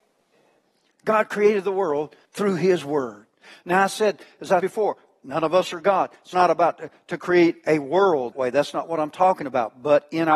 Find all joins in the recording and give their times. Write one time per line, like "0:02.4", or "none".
0:02.2
0:04.6
0:06.3
0:08.3